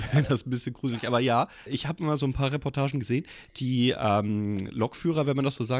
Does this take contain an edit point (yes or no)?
yes